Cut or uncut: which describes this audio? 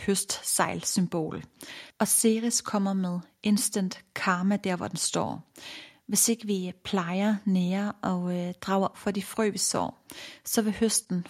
cut